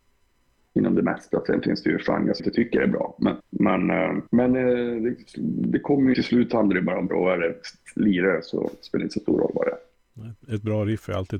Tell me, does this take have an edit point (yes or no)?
yes